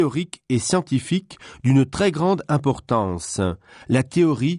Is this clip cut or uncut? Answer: uncut